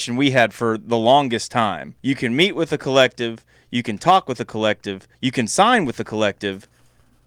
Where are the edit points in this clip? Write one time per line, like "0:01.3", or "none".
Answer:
0:02.0
0:05.1